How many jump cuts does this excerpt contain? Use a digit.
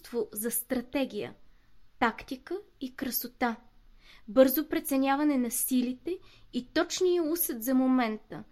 0